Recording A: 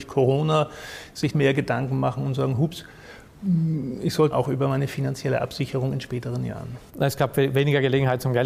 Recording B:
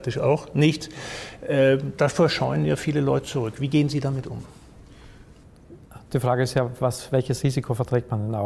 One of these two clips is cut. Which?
A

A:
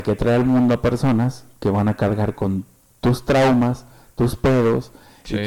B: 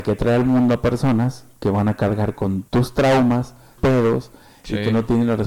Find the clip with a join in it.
B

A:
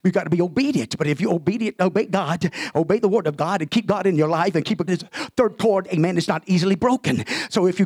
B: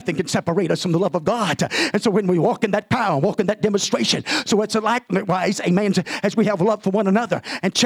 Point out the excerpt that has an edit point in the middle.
A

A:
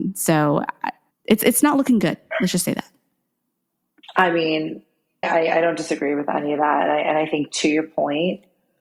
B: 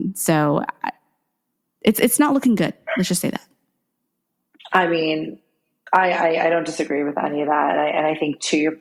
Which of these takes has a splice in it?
A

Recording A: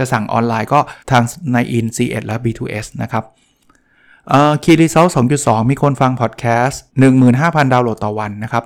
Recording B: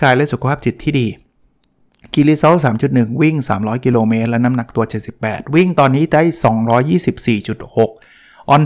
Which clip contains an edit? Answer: A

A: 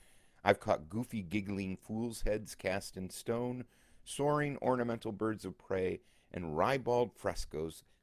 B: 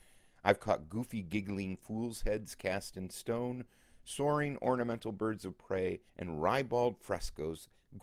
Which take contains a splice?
B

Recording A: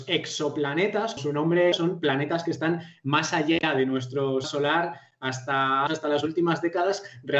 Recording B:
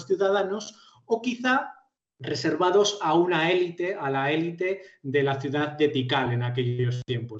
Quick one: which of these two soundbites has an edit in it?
A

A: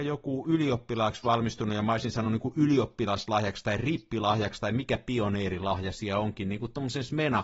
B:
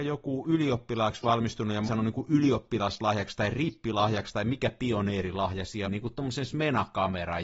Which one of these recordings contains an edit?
B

